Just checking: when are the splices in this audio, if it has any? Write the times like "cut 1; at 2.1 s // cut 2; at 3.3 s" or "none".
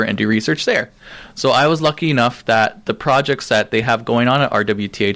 none